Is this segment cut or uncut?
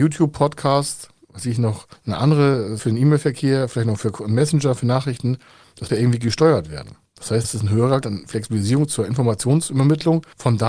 cut